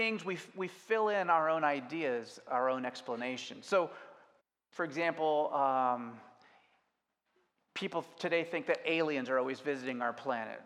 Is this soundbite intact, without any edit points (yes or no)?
no